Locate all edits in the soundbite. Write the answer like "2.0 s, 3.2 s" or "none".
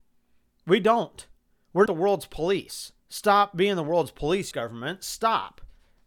1.9 s, 3.0 s, 4.5 s